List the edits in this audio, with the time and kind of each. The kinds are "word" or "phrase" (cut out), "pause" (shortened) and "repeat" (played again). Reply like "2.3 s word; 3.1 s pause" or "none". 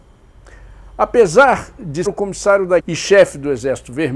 2.1 s word; 2.8 s word